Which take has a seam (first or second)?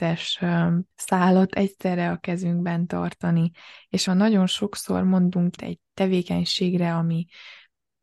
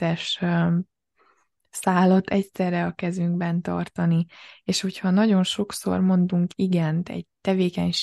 first